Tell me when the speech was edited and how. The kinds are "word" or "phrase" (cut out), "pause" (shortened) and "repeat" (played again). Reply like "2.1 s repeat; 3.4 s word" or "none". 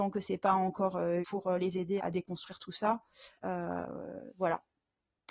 1.2 s phrase; 2.0 s word; 3.4 s pause